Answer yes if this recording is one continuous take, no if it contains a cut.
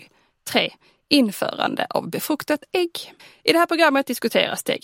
no